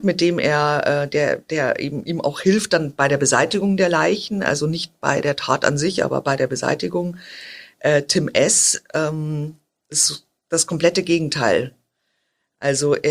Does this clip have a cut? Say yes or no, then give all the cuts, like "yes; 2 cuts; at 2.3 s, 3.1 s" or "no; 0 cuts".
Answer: no; 0 cuts